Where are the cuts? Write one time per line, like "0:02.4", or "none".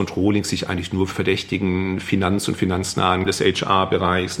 0:01.1
0:03.3